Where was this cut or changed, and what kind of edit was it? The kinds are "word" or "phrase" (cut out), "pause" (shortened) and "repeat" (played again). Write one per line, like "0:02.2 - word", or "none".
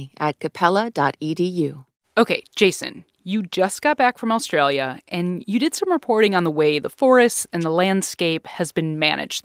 0:02.0 - pause